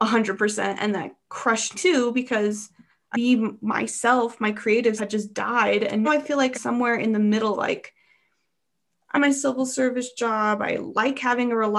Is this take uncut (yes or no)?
no